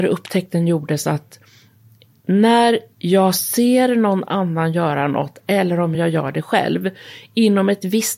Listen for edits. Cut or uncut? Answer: uncut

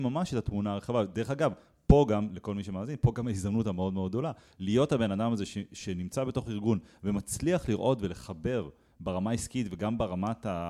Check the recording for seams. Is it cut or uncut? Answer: uncut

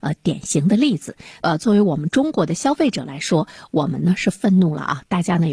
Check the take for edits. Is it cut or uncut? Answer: uncut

